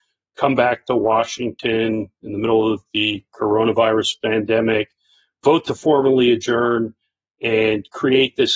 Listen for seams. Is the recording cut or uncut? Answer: uncut